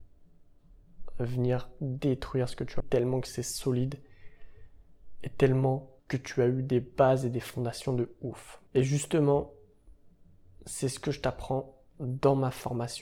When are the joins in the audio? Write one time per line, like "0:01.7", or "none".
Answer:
0:02.8
0:06.0
0:08.7